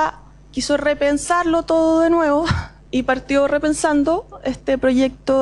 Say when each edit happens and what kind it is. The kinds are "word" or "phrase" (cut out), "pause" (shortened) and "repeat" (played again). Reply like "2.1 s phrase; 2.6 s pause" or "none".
none